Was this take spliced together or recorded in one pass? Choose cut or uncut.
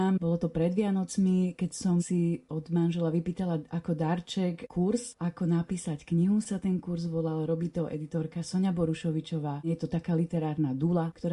uncut